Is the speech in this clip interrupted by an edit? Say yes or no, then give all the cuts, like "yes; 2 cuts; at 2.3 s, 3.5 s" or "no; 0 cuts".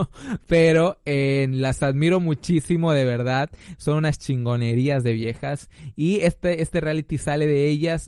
no; 0 cuts